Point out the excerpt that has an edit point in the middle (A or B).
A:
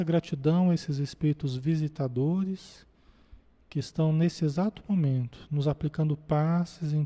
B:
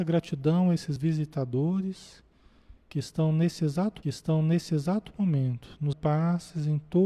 B